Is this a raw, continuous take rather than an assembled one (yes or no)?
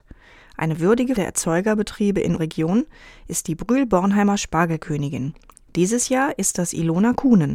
no